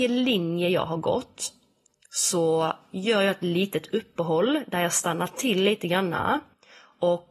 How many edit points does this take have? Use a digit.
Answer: 0